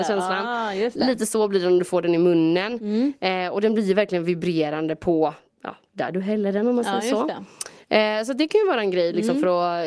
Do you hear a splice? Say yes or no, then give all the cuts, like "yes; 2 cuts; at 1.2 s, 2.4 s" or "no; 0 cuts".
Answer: no; 0 cuts